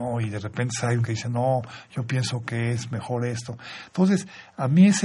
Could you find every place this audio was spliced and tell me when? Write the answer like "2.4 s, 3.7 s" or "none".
1.0 s